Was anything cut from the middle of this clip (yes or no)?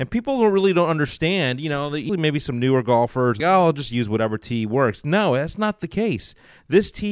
yes